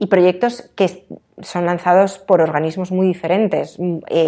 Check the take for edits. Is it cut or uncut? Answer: uncut